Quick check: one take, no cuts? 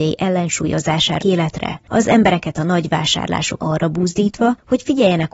no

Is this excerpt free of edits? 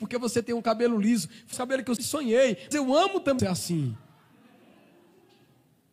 no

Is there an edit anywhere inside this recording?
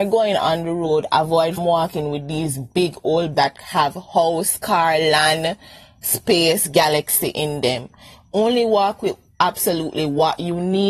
yes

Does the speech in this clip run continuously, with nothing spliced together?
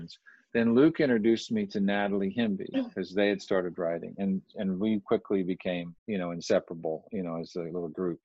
no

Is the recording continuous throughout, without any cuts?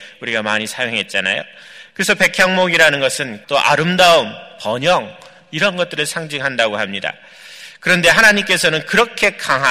no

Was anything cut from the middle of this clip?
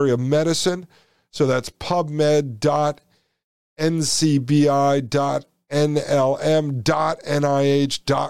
no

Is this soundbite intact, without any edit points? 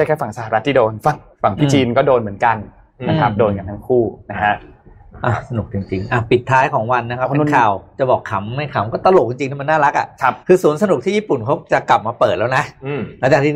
no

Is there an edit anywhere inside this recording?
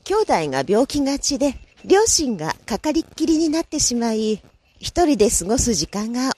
yes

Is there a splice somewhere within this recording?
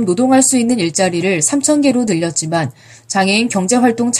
no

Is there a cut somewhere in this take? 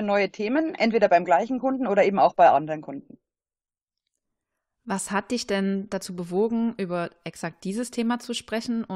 no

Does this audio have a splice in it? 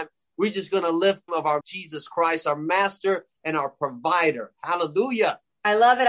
yes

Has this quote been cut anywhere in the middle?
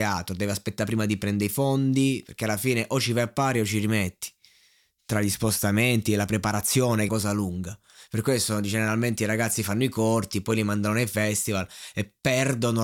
yes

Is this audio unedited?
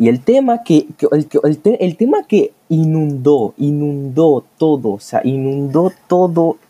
no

